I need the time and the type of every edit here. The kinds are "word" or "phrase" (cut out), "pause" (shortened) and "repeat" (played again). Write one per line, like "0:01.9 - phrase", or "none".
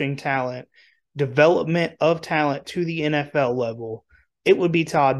none